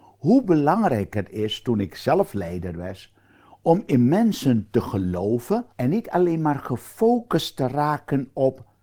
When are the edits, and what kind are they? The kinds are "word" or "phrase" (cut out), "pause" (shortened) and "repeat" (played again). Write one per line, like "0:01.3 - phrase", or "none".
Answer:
0:05.7 - pause